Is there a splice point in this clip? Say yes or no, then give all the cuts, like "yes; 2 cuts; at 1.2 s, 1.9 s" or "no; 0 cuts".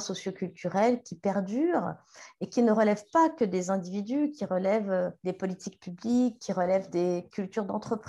no; 0 cuts